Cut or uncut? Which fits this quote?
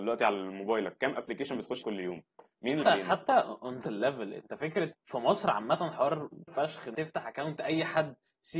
cut